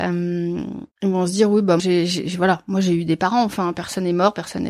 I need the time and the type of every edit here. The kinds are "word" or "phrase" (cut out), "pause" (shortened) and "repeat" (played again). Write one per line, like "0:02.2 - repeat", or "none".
0:00.9 - pause
0:01.8 - phrase